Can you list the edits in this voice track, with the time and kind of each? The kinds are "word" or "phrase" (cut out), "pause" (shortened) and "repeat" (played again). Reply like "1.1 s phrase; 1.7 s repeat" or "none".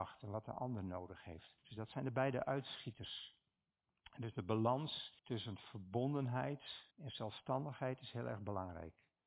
1.6 s pause; 5.2 s pause; 6.9 s pause